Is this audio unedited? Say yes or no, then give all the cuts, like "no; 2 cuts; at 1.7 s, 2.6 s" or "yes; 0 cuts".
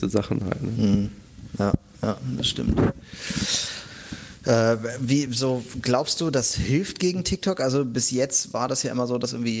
yes; 0 cuts